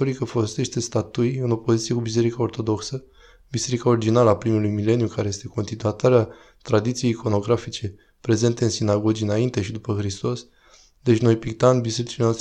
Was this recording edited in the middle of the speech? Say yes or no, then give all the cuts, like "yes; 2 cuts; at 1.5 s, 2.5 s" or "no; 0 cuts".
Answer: no; 0 cuts